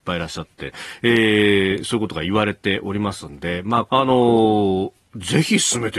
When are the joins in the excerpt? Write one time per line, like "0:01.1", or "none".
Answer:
0:03.9

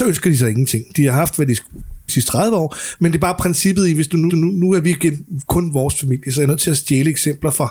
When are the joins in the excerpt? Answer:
0:02.1
0:04.3

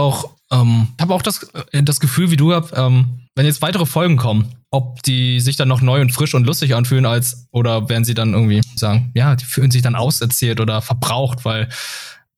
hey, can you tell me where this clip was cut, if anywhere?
0:01.0
0:03.3
0:04.6
0:08.8

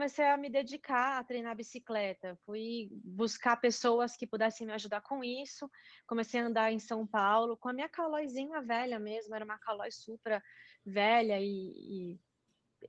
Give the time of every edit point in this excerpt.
none

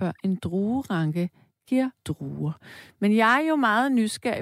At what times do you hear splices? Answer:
0:02.0

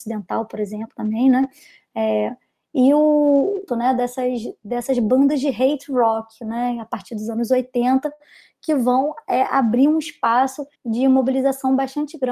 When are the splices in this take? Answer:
0:03.7
0:10.7

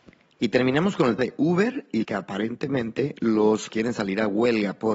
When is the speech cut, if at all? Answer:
0:01.2
0:02.0
0:03.7

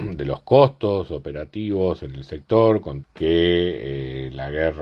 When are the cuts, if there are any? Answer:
0:03.0

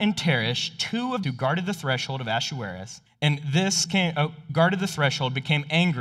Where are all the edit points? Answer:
0:01.2
0:03.1
0:03.9
0:04.5

